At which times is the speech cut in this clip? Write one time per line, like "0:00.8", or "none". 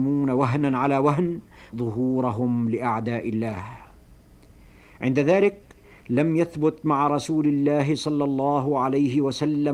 0:01.7